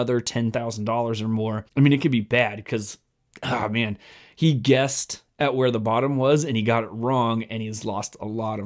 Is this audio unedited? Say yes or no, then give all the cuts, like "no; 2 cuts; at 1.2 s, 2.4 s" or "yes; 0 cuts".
no; 1 cut; at 1.7 s